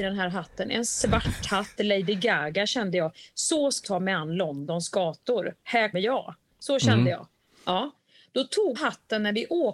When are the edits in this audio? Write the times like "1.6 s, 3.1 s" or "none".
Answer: 1.8 s, 3.8 s, 5.9 s, 8.8 s